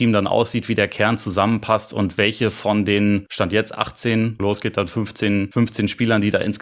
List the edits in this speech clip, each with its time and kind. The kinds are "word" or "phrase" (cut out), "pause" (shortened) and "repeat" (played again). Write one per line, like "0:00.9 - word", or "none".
0:04.4 - phrase